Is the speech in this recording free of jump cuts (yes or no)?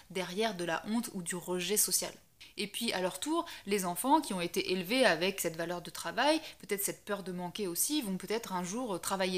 yes